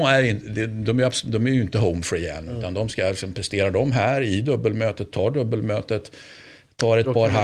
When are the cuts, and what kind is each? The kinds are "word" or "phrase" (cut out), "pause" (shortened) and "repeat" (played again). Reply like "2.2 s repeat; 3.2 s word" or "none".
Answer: none

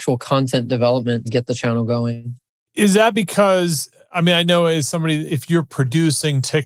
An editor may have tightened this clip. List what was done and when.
1.3 s word; 2.5 s pause; 5.3 s word

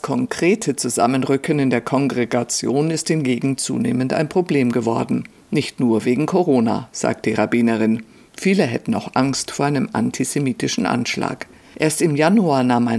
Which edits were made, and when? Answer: none

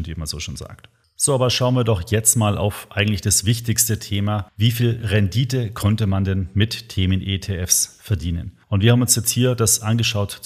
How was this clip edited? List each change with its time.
none

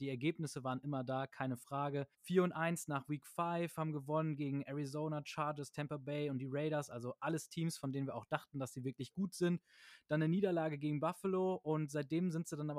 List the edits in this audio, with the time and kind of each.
2.1 s pause

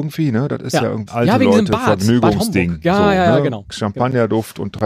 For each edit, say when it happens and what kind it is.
1.1 s word

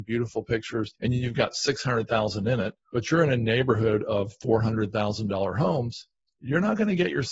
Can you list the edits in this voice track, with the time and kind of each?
1.0 s pause; 2.8 s pause

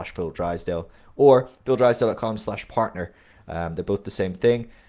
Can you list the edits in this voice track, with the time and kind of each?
none

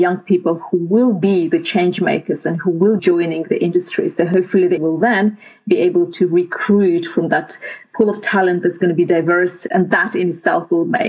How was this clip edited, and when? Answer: 3.0 s word; 4.8 s word; 9.7 s word

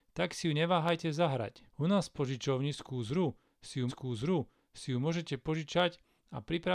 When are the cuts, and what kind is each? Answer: 1.7 s pause; 3.9 s repeat

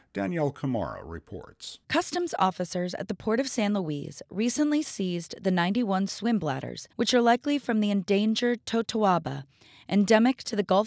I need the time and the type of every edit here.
1.8 s pause; 6.9 s pause

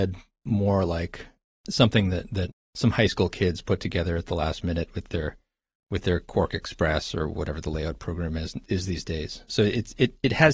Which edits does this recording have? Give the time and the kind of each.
none

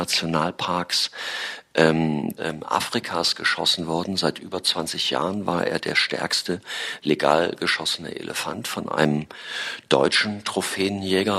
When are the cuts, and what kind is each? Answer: 2.4 s phrase

